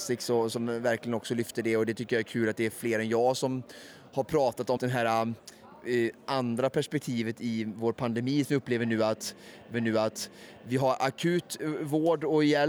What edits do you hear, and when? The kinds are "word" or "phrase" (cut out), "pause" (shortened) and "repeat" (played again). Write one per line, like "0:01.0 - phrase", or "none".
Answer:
0:04.8 - word
0:09.7 - repeat